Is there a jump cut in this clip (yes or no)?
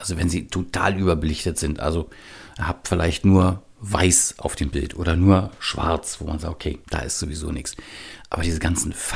yes